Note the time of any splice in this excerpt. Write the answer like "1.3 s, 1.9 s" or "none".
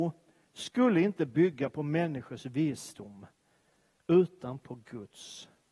none